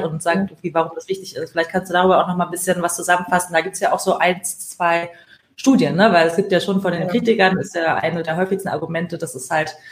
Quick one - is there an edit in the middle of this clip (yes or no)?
no